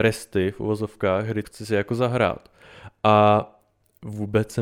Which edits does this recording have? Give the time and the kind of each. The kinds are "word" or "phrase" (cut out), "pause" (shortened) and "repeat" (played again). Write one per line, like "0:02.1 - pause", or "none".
0:01.4 - word